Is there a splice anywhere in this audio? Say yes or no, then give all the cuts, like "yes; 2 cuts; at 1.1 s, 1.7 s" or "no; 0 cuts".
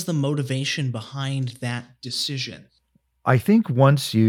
no; 0 cuts